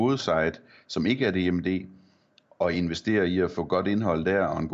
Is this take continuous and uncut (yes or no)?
yes